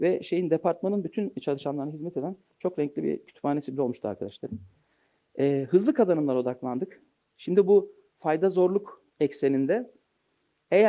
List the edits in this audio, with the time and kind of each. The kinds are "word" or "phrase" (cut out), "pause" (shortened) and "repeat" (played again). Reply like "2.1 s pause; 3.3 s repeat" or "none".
9.1 s pause